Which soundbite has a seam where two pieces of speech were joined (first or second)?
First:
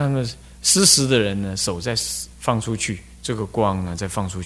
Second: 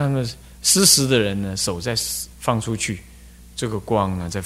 first